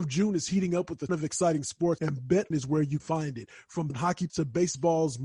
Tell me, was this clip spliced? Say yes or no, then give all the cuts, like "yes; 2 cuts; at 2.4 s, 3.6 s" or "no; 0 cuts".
yes; 6 cuts; at 1.1 s, 2.0 s, 2.5 s, 3.0 s, 3.9 s, 4.3 s